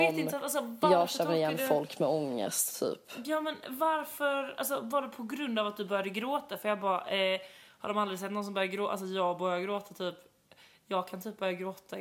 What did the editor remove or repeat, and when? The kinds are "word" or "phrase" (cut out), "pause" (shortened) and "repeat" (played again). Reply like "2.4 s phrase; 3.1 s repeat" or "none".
none